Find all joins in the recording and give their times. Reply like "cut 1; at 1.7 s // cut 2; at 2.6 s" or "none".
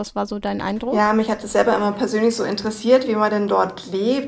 none